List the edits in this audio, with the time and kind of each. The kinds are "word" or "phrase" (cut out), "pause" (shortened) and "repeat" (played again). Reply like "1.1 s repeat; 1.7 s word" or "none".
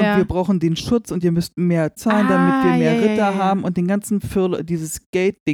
2.0 s word